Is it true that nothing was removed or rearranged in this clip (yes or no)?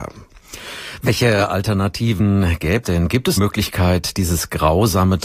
no